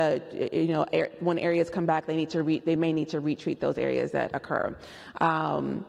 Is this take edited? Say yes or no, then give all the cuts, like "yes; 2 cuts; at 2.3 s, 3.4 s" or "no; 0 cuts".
no; 0 cuts